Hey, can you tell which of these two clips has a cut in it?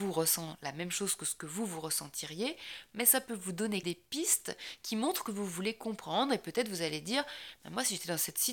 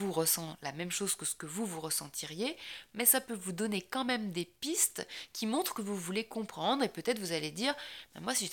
first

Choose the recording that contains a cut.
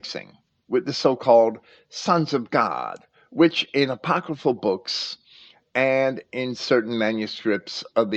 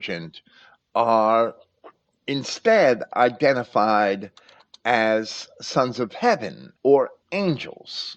second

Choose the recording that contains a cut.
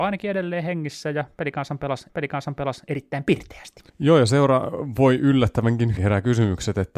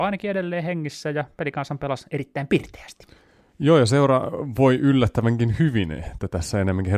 first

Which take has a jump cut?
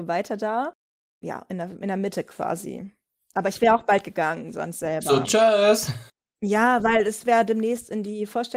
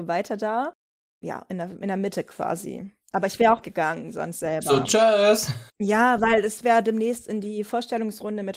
second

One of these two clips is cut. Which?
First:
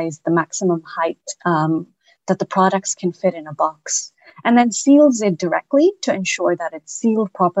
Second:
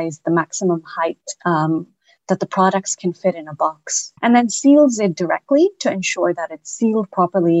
second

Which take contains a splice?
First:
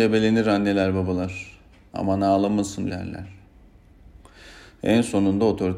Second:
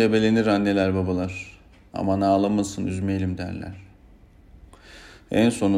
first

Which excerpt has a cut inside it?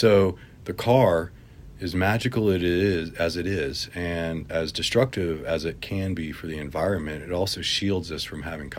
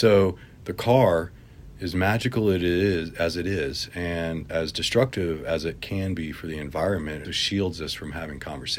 second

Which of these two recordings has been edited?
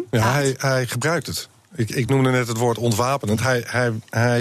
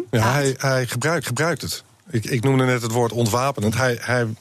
second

